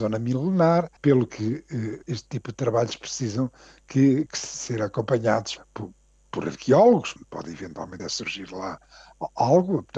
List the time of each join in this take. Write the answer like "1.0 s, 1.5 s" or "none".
1.0 s, 2.0 s, 4.3 s, 5.6 s, 7.2 s, 8.0 s